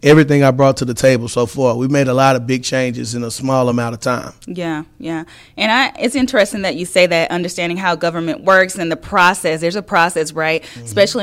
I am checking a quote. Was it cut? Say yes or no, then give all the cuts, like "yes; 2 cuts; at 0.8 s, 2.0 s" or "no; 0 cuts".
no; 0 cuts